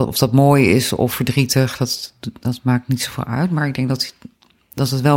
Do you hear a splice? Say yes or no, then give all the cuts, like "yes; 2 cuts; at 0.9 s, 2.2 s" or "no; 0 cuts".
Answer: no; 0 cuts